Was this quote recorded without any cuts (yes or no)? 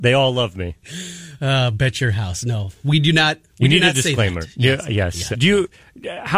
no